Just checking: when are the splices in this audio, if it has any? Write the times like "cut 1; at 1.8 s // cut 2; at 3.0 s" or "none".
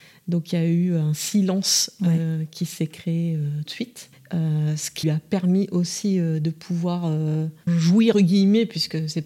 cut 1; at 3.6 s // cut 2; at 4.1 s // cut 3; at 5.0 s // cut 4; at 7.7 s // cut 5; at 8.1 s